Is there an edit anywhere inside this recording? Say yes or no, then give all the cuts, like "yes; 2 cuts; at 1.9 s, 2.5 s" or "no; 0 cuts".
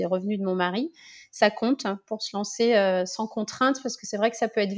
no; 0 cuts